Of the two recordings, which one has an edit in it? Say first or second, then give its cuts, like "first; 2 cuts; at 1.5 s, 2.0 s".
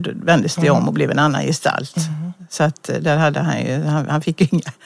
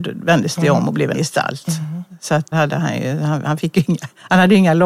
second; 2 cuts; at 1.1 s, 2.5 s